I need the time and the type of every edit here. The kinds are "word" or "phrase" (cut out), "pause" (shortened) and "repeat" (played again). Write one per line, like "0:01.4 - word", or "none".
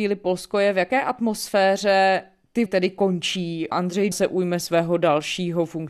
0:02.7 - word
0:03.7 - word
0:04.1 - word